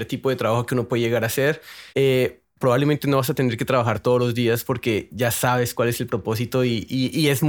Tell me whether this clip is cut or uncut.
cut